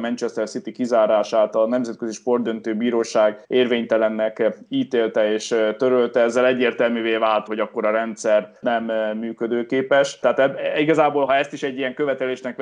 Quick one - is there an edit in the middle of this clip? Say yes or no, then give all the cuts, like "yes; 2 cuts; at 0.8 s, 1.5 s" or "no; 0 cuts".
yes; 4 cuts; at 3.4 s, 7.5 s, 8.6 s, 11.3 s